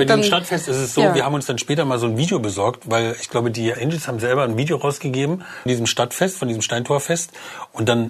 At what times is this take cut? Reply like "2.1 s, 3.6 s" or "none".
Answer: 3.7 s, 5.7 s